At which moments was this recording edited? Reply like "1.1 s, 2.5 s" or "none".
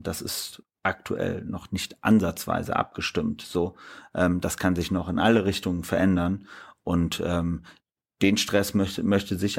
7.9 s